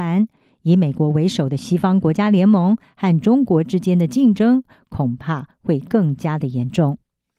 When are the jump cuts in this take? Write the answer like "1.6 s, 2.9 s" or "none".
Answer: none